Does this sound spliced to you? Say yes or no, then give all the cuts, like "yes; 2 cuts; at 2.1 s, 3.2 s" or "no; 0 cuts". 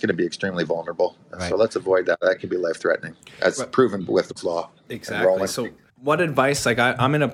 yes; 2 cuts; at 4.4 s, 5.9 s